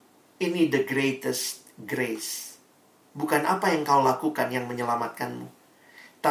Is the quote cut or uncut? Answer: uncut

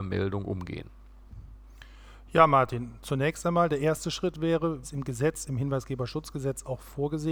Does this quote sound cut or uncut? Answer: cut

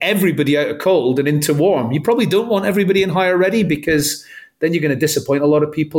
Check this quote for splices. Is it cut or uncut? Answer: uncut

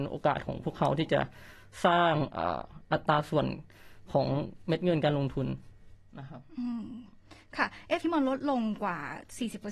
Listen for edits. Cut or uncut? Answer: cut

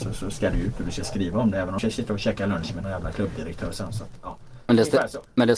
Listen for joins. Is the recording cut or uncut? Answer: cut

